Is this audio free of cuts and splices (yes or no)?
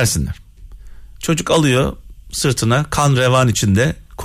yes